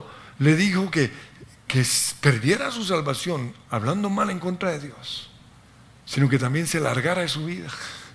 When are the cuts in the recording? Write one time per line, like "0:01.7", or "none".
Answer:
none